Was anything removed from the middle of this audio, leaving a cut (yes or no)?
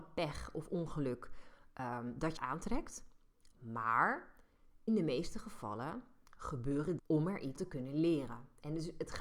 yes